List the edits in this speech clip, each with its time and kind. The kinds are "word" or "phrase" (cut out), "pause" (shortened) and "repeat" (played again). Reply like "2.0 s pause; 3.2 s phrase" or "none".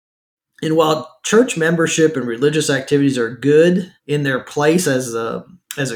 4.0 s pause